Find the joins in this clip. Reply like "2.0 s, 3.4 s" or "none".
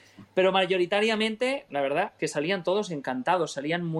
1.7 s, 2.2 s